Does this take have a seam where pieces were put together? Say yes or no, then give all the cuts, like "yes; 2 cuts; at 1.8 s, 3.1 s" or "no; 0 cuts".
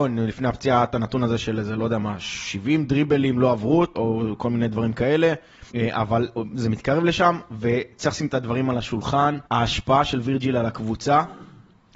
yes; 3 cuts; at 3.9 s, 5.7 s, 9.5 s